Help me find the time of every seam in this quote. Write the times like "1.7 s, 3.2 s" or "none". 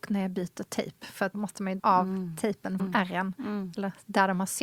1.3 s, 1.8 s, 2.8 s